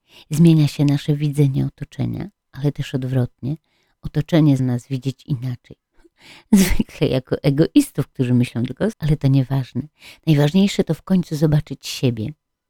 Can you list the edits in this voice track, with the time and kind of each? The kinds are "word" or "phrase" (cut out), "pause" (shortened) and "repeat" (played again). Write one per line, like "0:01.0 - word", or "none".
0:04.6 - word
0:08.9 - word